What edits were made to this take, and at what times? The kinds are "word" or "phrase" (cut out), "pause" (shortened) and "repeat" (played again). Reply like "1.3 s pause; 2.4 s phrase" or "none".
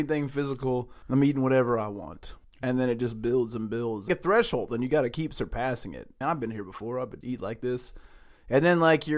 1.0 s pause; 2.4 s pause; 4.1 s phrase; 6.2 s phrase; 7.2 s word